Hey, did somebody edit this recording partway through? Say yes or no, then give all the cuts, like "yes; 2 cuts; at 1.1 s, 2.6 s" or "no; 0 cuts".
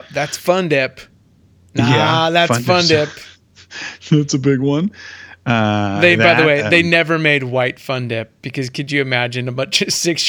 no; 0 cuts